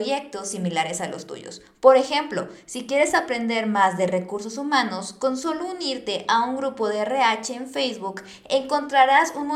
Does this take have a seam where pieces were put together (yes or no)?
no